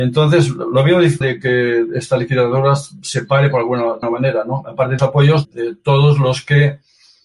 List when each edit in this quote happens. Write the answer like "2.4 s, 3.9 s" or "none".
1.2 s, 4.0 s, 5.0 s, 5.4 s